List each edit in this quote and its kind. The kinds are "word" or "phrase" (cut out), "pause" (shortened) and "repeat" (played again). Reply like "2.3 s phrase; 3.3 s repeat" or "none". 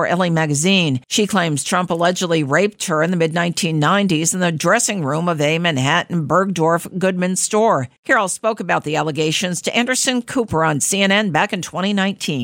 1.0 s pause; 8.0 s pause